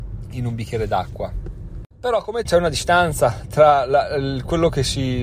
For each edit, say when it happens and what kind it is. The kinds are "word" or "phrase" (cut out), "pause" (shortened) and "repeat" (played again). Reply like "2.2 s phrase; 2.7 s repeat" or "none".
1.9 s pause; 2.5 s phrase